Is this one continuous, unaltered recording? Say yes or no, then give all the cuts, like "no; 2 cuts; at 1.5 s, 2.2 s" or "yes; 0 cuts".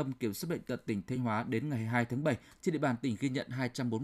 yes; 0 cuts